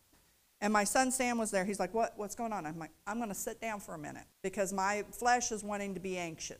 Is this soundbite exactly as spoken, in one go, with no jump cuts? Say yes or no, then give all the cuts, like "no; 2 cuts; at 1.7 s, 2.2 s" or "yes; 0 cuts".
no; 1 cut; at 4.3 s